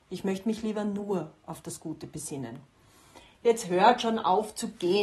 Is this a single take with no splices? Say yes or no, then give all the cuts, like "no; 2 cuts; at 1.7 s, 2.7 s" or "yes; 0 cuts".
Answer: yes; 0 cuts